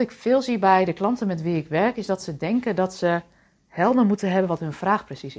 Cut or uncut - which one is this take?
uncut